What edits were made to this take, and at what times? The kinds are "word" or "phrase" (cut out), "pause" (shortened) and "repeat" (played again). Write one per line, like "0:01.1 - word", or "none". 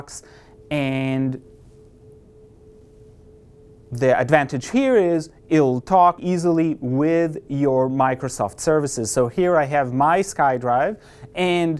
0:06.2 - word